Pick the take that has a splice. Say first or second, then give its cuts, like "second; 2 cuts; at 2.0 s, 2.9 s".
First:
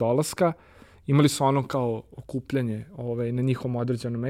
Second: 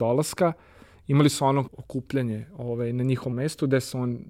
second; 2 cuts; at 1.7 s, 3.3 s